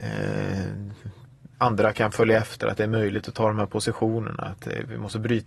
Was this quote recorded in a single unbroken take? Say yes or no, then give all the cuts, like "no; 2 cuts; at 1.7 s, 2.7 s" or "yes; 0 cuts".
no; 1 cut; at 1.5 s